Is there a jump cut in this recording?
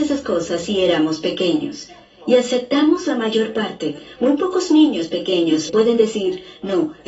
yes; 1 cut; at 5.7 s

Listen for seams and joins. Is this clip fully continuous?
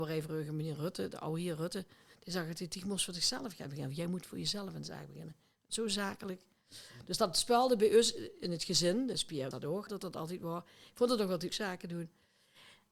no; 3 cuts; at 9.5 s, 9.9 s, 11.5 s

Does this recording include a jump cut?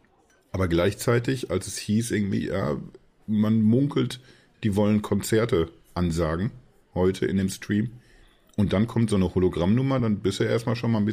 no; 0 cuts

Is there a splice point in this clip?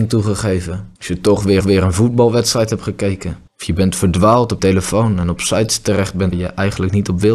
yes; 5 cuts; at 1.0 s, 1.6 s, 3.5 s, 4.6 s, 6.3 s

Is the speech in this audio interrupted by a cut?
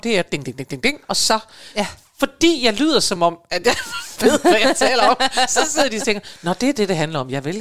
no; 0 cuts

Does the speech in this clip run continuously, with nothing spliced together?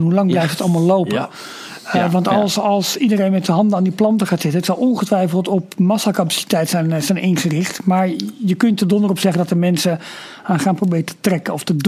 yes; 0 cuts

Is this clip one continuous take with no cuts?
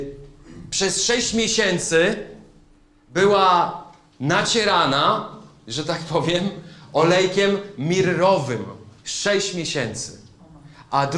yes; 0 cuts

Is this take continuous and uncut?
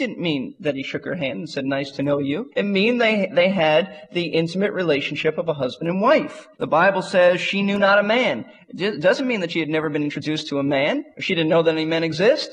no; 2 cuts; at 2.5 s, 6.5 s

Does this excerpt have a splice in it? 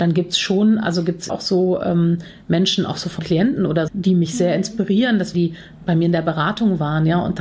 yes; 4 cuts; at 1.3 s, 3.2 s, 3.9 s, 5.3 s

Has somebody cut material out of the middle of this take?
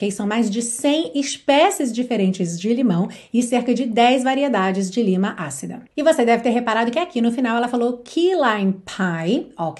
yes; 1 cut; at 5.9 s

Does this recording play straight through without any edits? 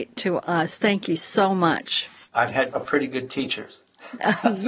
yes; 0 cuts

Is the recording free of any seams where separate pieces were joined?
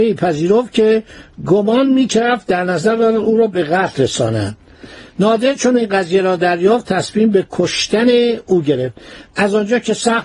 yes; 0 cuts

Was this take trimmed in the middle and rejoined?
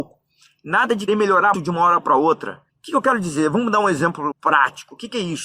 yes; 4 cuts; at 1.1 s, 1.5 s, 2.7 s, 4.3 s

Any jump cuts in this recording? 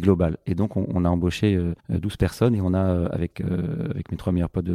yes; 1 cut; at 1.8 s

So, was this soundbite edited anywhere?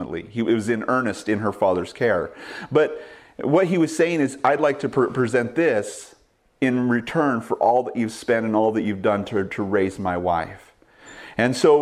no; 0 cuts

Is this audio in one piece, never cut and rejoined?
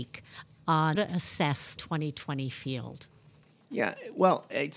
no; 2 cuts; at 1.0 s, 1.8 s

